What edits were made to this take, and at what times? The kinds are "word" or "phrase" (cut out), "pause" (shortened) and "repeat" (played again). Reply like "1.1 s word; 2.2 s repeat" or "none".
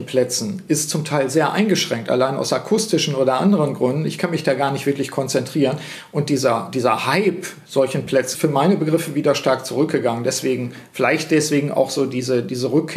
8.3 s phrase